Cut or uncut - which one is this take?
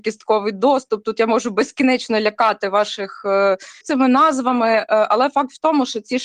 cut